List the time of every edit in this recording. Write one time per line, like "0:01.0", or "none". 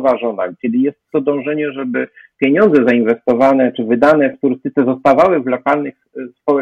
none